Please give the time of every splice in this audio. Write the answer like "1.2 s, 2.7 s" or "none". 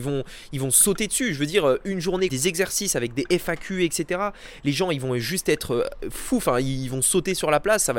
2.3 s